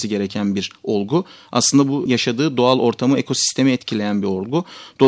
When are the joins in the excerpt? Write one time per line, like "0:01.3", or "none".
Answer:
0:02.1